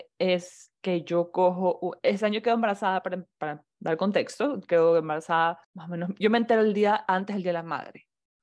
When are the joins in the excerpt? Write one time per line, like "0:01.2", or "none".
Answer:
0:05.6